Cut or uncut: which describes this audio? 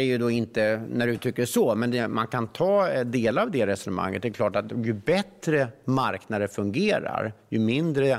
uncut